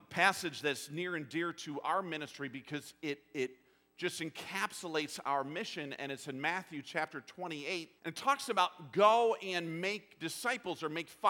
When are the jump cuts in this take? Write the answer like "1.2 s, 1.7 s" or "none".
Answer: 8.0 s